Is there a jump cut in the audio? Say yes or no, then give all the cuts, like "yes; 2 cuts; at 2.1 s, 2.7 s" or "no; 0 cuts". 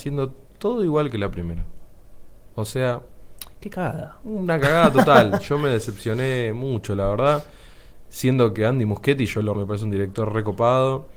yes; 1 cut; at 9.5 s